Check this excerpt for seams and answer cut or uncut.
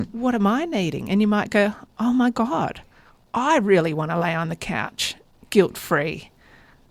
uncut